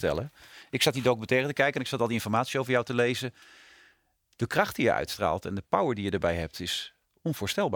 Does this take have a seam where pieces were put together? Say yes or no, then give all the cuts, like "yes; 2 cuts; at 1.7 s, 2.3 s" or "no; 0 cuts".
no; 0 cuts